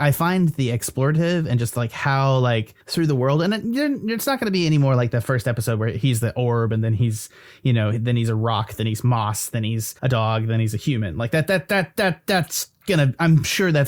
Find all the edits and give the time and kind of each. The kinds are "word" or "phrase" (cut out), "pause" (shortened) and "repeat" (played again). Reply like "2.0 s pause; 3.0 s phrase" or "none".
2.8 s pause; 10.0 s pause